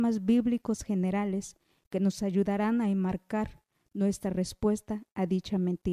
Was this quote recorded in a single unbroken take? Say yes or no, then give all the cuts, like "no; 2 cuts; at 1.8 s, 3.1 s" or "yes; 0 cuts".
yes; 0 cuts